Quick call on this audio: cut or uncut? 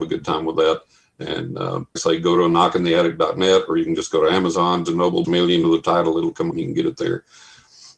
cut